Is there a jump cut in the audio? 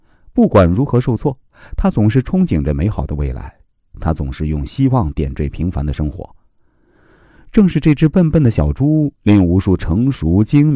no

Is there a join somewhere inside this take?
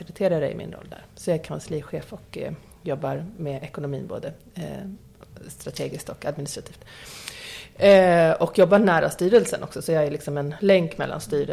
no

